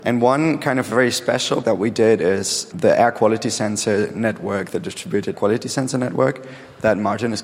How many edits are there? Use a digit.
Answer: 3